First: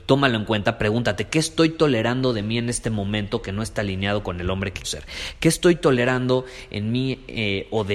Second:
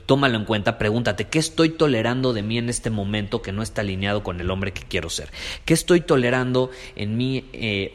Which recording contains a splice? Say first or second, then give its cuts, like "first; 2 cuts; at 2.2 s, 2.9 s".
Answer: first; 1 cut; at 4.8 s